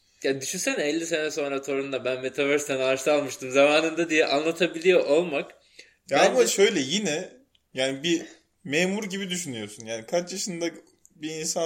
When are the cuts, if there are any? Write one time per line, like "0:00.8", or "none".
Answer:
none